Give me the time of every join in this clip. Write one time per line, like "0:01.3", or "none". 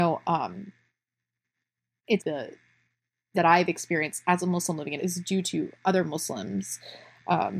0:02.2
0:03.3
0:05.0

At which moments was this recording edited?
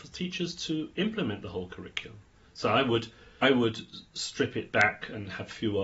0:03.4

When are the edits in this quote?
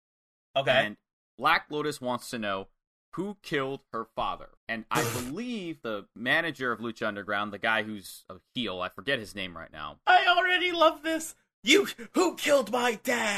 0:04.6
0:05.8

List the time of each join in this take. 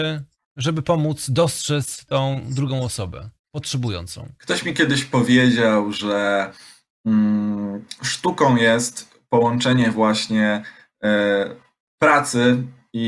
0:04.4

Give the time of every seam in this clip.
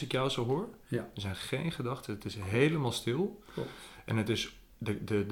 none

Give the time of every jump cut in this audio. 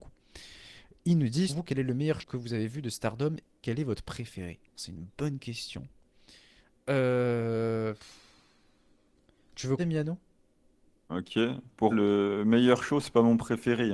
0:01.5
0:02.2
0:03.6
0:04.8
0:09.8
0:11.1
0:11.9

